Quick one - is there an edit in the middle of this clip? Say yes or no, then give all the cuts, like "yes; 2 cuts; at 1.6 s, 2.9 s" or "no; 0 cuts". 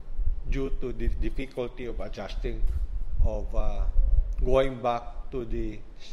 no; 0 cuts